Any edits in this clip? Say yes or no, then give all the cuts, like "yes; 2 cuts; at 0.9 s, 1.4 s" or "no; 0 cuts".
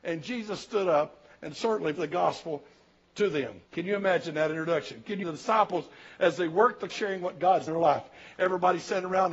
yes; 5 cuts; at 1.9 s, 3.6 s, 5.2 s, 6.9 s, 7.7 s